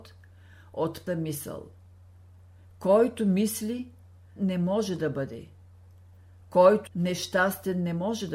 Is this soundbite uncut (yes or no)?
no